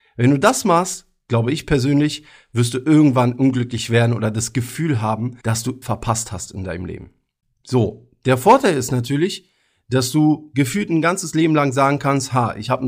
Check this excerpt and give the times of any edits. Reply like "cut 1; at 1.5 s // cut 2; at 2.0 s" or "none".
cut 1; at 5.4 s // cut 2; at 5.8 s